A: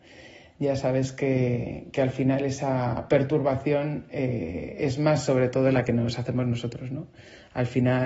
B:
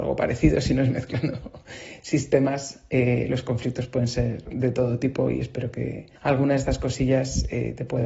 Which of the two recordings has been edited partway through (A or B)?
B